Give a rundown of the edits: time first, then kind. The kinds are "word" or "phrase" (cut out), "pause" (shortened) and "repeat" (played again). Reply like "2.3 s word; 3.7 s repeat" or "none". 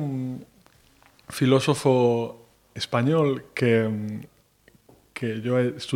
none